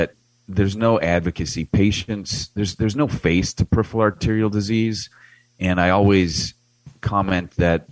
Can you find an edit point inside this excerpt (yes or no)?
no